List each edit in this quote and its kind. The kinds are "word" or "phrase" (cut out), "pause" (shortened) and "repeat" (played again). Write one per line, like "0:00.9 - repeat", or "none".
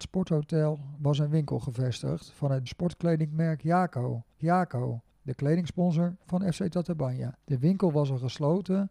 0:02.7 - word
0:04.4 - repeat
0:07.4 - pause